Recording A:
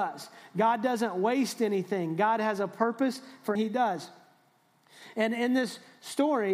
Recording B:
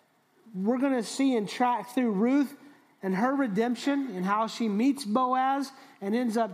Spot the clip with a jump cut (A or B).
A